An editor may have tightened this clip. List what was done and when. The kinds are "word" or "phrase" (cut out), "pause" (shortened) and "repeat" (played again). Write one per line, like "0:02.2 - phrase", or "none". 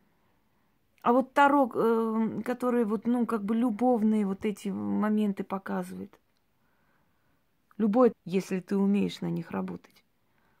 0:08.1 - phrase